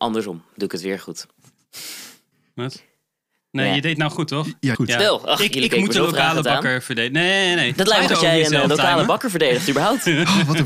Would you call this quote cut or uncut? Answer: cut